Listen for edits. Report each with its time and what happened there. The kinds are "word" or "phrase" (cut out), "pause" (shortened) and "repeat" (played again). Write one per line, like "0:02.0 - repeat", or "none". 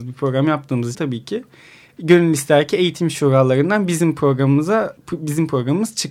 0:00.9 - word
0:05.0 - word